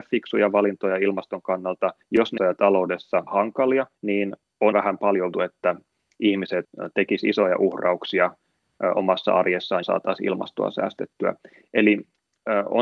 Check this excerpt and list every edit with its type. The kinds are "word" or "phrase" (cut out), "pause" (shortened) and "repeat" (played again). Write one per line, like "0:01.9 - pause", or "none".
0:02.0 - pause
0:02.4 - phrase
0:03.3 - phrase
0:03.9 - pause
0:04.7 - word
0:05.3 - word
0:09.8 - word